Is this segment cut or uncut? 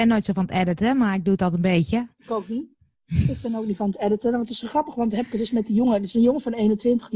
uncut